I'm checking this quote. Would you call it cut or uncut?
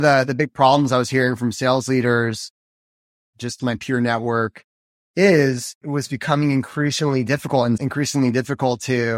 cut